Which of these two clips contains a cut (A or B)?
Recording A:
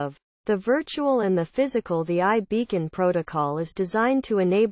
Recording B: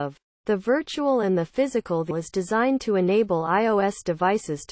B